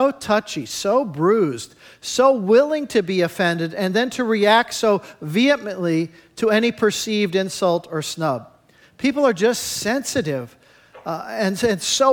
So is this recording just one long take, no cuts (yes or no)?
yes